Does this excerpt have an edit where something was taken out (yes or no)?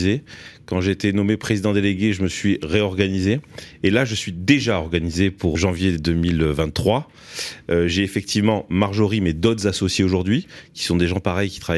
yes